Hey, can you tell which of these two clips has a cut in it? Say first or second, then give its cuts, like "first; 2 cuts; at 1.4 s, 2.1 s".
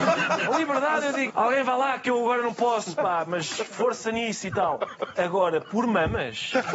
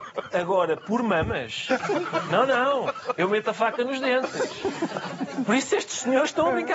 first; 1 cut; at 1.3 s